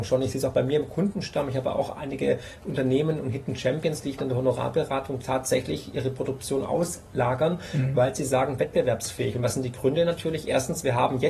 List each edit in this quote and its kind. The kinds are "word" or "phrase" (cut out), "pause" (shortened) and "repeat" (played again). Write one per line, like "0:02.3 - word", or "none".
0:04.2 - word
0:05.2 - word
0:08.6 - phrase